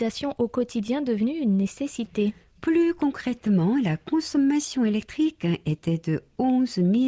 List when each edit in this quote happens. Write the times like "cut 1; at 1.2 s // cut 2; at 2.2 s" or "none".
none